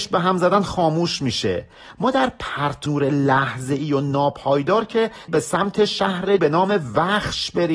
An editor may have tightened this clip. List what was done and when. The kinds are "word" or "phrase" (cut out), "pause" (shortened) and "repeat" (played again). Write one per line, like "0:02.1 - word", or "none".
0:02.9 - word
0:05.3 - word
0:06.4 - word